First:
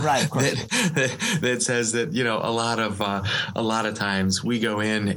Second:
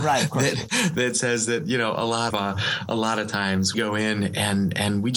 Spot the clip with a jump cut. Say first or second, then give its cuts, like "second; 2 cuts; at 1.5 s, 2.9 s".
second; 3 cuts; at 0.9 s, 2.3 s, 3.7 s